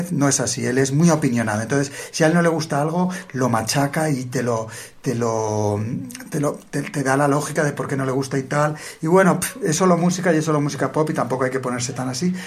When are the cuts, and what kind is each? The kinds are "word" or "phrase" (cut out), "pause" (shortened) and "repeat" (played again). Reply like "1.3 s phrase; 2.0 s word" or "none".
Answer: none